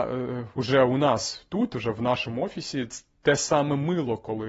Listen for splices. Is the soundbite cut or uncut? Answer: uncut